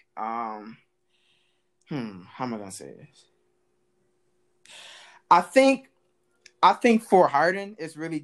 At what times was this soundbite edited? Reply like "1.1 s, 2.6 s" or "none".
none